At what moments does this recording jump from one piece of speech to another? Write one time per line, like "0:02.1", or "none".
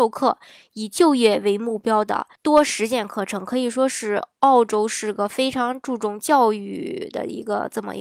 0:02.4